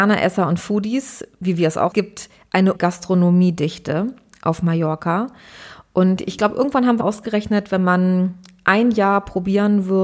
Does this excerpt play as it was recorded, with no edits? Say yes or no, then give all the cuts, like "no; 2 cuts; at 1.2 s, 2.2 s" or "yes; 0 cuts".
no; 3 cuts; at 1.9 s, 2.7 s, 7.0 s